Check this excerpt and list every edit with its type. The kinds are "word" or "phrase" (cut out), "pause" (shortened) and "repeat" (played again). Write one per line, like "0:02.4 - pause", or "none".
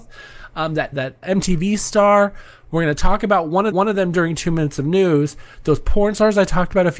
0:00.9 - phrase
0:01.2 - word
0:03.7 - repeat